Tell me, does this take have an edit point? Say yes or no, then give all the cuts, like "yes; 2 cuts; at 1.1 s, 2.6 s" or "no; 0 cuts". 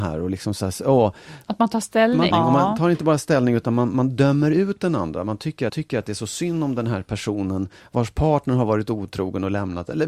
yes; 2 cuts; at 2.3 s, 5.7 s